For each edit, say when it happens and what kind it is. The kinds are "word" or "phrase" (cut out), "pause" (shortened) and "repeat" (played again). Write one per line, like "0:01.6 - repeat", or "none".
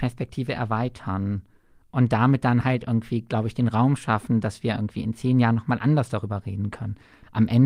none